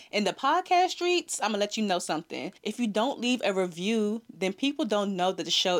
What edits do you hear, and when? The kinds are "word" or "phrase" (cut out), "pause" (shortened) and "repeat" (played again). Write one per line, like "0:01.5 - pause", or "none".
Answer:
0:02.6 - pause